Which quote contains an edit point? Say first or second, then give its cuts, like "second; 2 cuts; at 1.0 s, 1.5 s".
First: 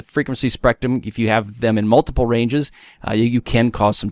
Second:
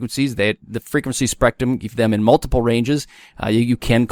second; 1 cut; at 1.9 s